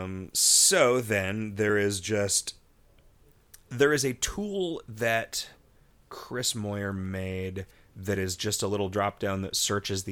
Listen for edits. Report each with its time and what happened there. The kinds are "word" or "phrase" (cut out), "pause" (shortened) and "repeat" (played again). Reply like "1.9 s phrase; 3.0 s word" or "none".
none